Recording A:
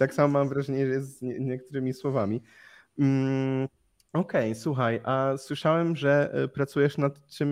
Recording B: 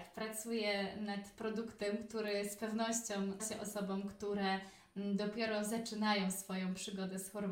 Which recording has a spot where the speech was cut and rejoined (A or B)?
B